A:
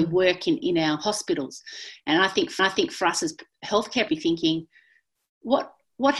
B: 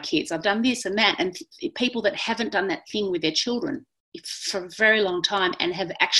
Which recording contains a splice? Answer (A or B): A